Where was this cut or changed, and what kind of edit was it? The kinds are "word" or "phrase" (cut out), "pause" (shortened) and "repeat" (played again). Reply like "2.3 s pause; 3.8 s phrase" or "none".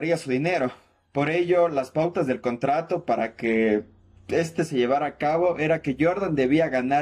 none